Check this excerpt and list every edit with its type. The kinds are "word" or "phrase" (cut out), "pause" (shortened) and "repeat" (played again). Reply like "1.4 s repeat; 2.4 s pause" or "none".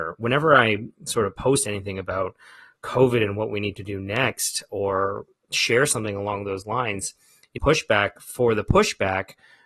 7.6 s phrase